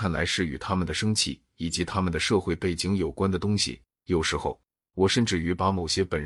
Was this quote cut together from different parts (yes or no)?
no